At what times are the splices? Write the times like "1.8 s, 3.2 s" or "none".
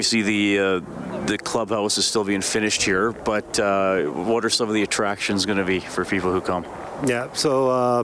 none